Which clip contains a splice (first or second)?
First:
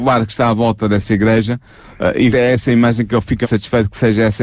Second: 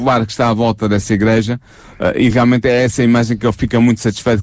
first